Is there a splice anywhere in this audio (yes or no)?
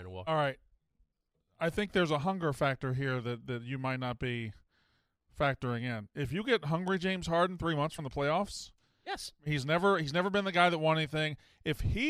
yes